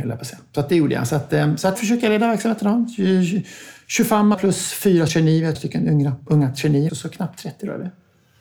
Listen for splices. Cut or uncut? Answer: cut